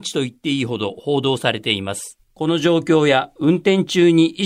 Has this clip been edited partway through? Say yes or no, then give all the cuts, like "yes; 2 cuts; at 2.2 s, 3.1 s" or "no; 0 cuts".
yes; 1 cut; at 2.2 s